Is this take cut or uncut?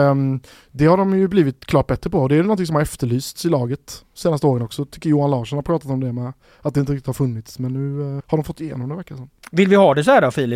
cut